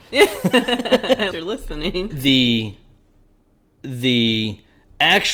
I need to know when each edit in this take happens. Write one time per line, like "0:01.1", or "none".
0:01.3
0:02.1